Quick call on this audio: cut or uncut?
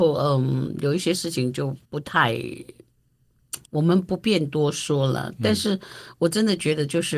cut